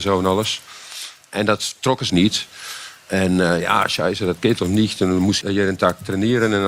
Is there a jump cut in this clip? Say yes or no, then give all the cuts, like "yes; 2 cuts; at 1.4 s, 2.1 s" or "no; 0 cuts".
yes; 2 cuts; at 2.1 s, 5.4 s